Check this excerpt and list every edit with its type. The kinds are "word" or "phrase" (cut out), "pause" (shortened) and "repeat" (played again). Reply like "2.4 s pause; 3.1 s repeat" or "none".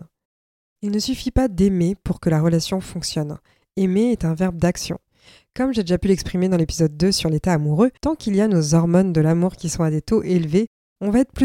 8.0 s pause